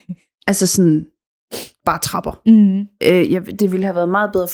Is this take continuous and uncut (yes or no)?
no